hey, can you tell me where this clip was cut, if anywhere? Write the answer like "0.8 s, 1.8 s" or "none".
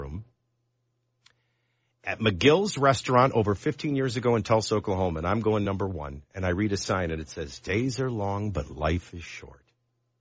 none